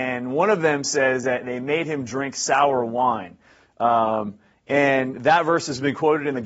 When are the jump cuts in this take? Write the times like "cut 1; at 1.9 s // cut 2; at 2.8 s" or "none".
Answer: none

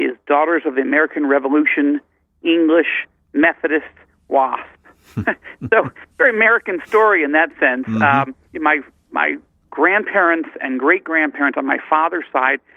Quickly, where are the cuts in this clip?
cut 1; at 8.5 s

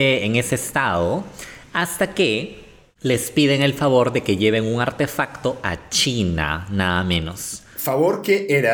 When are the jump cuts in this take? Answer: none

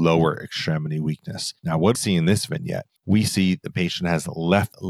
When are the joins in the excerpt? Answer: cut 1; at 1.6 s // cut 2; at 1.9 s // cut 3; at 3.0 s

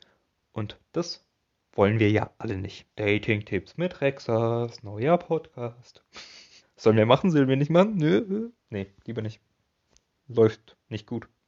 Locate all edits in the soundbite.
cut 1; at 2.9 s // cut 2; at 6.6 s // cut 3; at 8.6 s

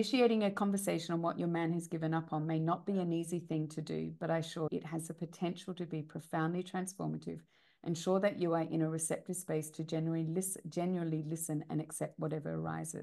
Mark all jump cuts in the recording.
cut 1; at 4.7 s

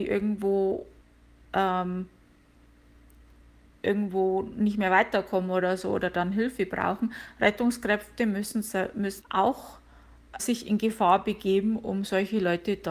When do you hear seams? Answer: cut 1; at 1.0 s // cut 2; at 9.2 s // cut 3; at 10.4 s

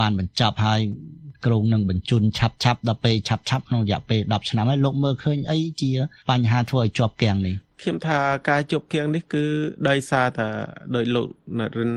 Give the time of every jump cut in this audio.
none

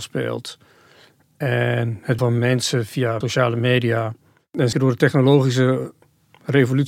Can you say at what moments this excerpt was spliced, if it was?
cut 1; at 2.2 s // cut 2; at 3.2 s // cut 3; at 4.7 s

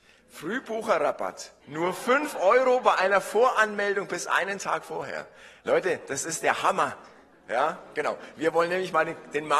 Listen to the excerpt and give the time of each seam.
cut 1; at 1.6 s

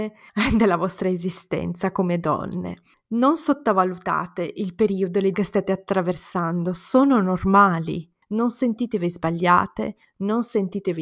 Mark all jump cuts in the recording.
cut 1; at 5.3 s

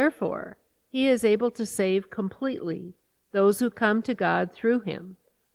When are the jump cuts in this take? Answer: none

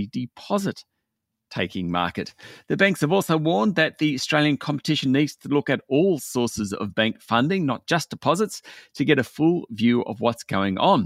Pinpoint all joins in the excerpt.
cut 1; at 5.1 s

